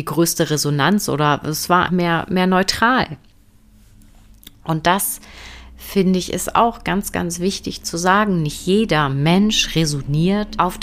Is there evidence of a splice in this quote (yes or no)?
yes